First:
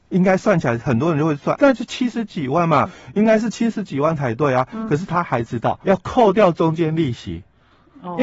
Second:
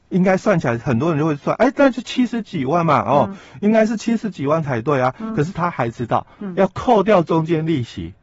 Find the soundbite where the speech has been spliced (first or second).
first